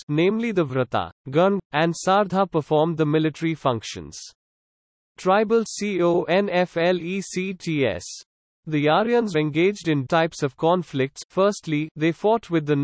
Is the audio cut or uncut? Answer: cut